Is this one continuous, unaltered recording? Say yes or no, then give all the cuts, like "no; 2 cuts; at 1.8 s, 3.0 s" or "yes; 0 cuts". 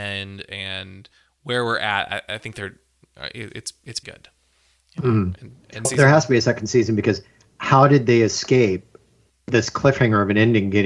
no; 2 cuts; at 4.0 s, 5.8 s